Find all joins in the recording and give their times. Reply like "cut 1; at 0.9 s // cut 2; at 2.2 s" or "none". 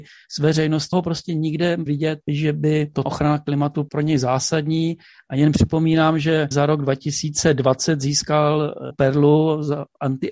cut 1; at 0.9 s // cut 2; at 1.9 s // cut 3; at 3.0 s // cut 4; at 8.9 s